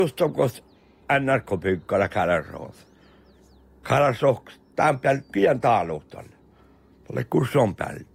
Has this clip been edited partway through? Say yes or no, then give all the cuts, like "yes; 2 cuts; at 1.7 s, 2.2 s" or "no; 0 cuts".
yes; 1 cut; at 5.3 s